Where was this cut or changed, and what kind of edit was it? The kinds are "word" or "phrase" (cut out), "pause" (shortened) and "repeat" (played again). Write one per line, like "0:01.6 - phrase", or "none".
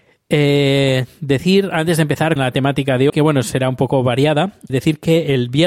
0:02.4 - word
0:03.1 - word
0:04.7 - word